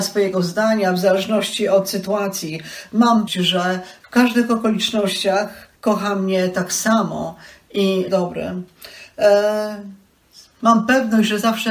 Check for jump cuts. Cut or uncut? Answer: cut